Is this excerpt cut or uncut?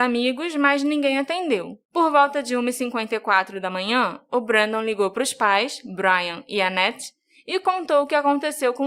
cut